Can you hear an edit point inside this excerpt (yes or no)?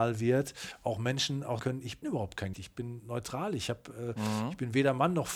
yes